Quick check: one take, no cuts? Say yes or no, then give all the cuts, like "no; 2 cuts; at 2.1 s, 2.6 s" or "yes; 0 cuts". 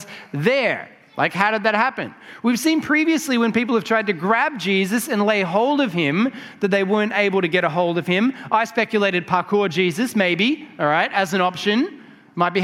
yes; 0 cuts